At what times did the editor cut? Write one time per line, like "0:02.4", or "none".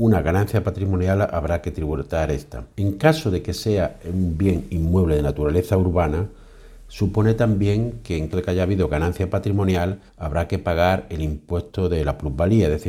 0:02.7
0:08.3
0:10.1